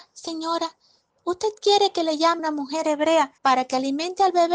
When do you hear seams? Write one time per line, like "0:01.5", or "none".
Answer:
0:02.4
0:03.4